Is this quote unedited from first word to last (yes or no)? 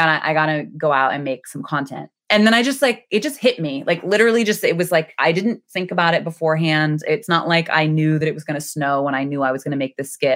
yes